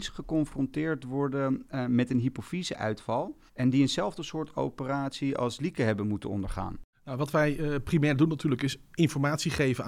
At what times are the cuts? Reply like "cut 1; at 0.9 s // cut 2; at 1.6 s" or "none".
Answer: cut 1; at 3.5 s // cut 2; at 6.9 s